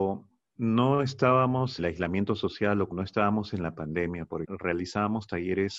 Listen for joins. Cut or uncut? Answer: cut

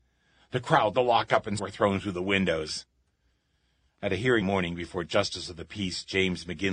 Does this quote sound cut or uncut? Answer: cut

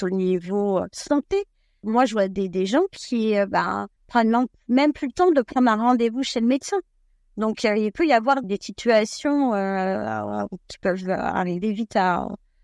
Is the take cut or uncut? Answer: cut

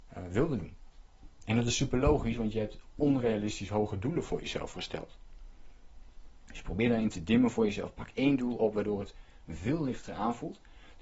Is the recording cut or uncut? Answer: uncut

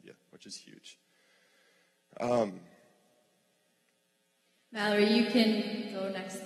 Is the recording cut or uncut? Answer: uncut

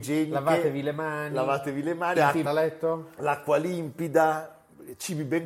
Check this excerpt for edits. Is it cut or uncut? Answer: cut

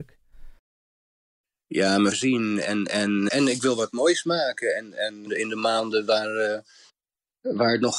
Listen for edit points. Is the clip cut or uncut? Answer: cut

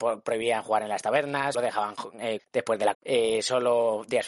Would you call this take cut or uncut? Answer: cut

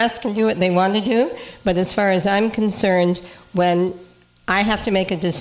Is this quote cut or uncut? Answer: uncut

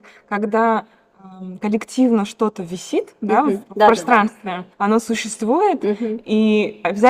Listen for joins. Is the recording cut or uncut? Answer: cut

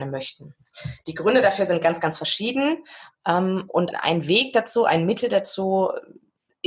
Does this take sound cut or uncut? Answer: cut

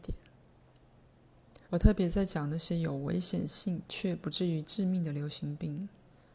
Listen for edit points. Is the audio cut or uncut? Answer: cut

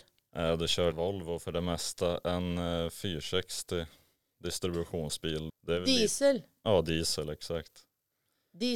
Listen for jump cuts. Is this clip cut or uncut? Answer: cut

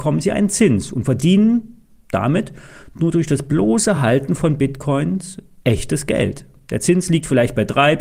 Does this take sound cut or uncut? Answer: uncut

